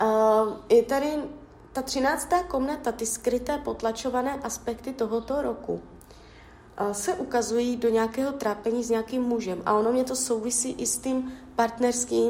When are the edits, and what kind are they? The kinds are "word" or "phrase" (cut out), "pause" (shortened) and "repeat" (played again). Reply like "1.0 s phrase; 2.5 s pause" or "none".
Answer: none